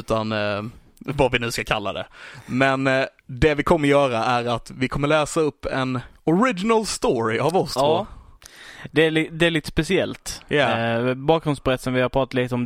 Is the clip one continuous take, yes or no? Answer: no